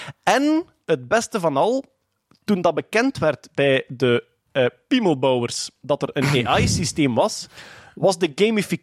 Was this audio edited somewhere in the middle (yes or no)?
no